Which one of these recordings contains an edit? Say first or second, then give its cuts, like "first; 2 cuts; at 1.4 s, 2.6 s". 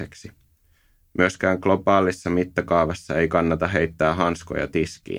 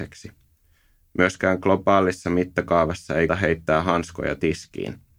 second; 1 cut; at 3.3 s